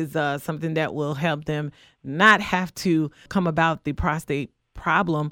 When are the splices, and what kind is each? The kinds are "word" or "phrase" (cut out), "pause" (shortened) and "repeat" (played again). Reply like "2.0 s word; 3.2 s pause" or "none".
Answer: none

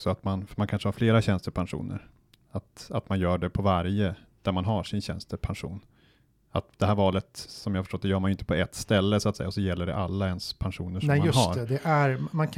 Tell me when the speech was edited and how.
none

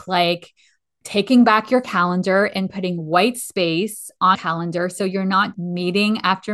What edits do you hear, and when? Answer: 4.3 s word; 5.5 s word

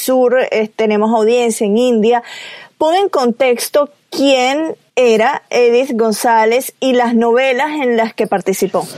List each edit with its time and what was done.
4.9 s pause

